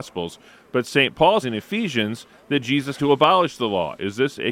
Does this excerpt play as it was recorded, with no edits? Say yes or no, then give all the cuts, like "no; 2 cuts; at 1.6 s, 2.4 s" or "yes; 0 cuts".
no; 2 cuts; at 1.4 s, 3.0 s